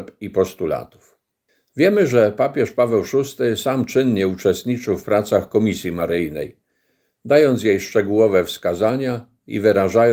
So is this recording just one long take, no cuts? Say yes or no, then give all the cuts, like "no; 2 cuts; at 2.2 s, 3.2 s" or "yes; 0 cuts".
yes; 0 cuts